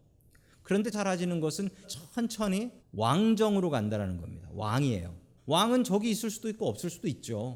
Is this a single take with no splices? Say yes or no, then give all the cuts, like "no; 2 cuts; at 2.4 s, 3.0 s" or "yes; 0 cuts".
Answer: no; 4 cuts; at 0.9 s, 1.8 s, 2.8 s, 5.4 s